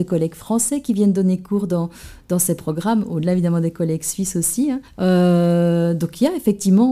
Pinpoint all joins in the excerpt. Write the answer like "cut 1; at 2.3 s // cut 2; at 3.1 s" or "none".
cut 1; at 4.9 s